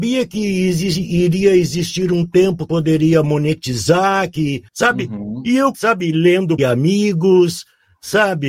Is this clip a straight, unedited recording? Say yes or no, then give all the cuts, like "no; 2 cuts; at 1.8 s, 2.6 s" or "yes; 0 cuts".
no; 4 cuts; at 2.7 s, 4.7 s, 5.7 s, 6.6 s